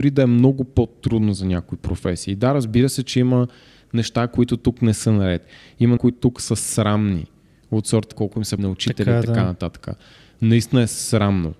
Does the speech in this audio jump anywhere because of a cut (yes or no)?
yes